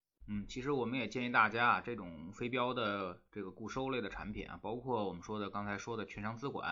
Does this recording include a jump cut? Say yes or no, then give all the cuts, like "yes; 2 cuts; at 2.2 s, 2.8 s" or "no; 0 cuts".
no; 0 cuts